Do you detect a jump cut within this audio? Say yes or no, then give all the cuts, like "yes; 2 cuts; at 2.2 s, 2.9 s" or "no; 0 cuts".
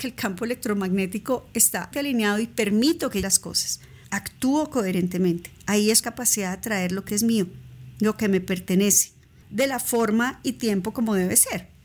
yes; 5 cuts; at 1.9 s, 3.2 s, 6.0 s, 7.1 s, 9.4 s